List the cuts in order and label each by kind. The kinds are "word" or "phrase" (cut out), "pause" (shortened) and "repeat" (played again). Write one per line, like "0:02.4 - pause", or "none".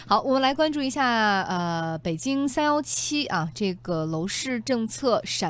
none